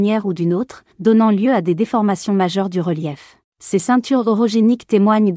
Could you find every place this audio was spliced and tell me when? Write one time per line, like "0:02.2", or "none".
0:00.9
0:03.4